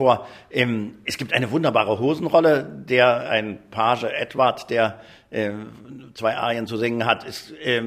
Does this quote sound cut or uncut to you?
uncut